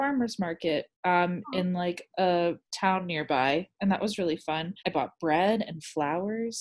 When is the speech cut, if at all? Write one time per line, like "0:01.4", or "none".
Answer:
0:00.9
0:02.6
0:04.8